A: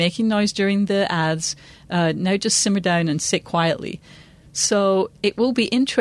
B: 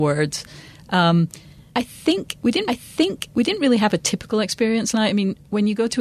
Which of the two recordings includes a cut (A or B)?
B